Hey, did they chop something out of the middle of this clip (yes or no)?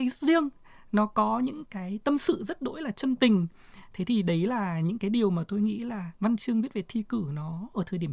yes